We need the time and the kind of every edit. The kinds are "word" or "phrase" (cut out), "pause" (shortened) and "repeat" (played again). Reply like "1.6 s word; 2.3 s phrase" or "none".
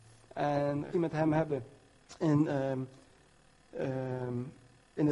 0.9 s word

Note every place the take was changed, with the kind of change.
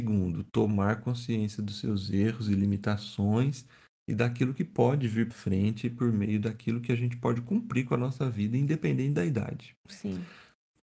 5.3 s word

